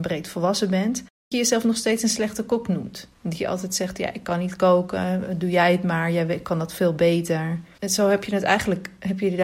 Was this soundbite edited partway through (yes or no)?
yes